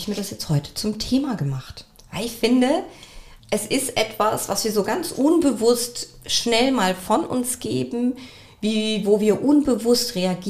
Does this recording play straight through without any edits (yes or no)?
no